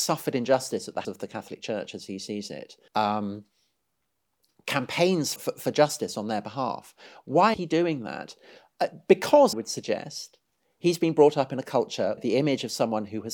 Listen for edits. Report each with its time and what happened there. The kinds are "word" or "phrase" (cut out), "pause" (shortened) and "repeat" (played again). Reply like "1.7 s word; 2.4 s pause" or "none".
1.0 s word; 2.9 s word; 5.4 s word; 7.5 s word; 9.5 s word; 12.2 s word